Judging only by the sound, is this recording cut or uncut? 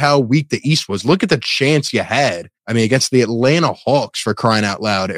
cut